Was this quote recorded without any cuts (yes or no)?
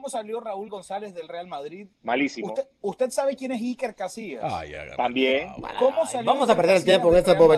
no